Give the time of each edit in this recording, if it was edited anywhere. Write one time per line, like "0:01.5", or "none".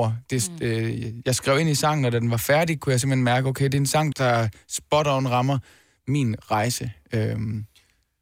0:04.1